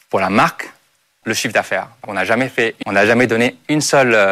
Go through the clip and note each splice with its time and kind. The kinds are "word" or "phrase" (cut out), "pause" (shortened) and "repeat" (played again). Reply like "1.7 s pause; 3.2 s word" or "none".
1.2 s word; 2.0 s word; 2.8 s word